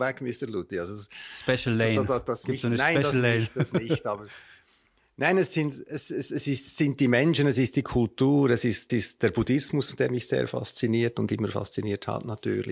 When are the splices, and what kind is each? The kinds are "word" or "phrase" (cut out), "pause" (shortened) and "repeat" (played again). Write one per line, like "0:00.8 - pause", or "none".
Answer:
0:08.9 - repeat